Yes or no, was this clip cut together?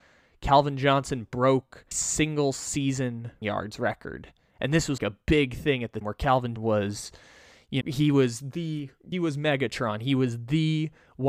yes